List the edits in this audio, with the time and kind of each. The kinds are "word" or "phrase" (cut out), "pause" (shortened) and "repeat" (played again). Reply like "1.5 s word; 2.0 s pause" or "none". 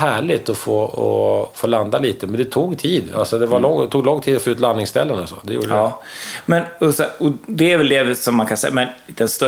none